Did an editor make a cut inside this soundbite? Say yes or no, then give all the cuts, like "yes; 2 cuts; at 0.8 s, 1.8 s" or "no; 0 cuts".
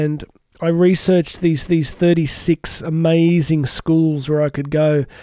yes; 1 cut; at 1.7 s